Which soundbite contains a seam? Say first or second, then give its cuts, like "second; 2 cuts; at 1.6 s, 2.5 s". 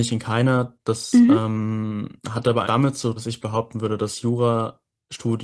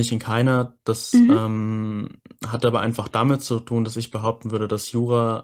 first; 3 cuts; at 2.2 s, 2.6 s, 3.2 s